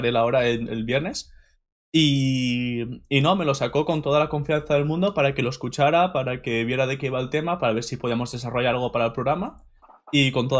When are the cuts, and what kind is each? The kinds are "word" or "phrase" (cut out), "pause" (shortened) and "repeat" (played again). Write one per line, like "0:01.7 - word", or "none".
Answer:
none